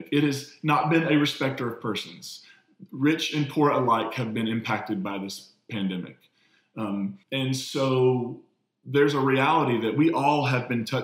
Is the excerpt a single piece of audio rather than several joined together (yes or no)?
no